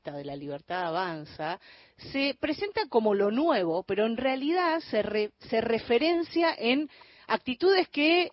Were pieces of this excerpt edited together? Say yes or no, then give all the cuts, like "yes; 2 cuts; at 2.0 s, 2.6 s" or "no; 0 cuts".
no; 0 cuts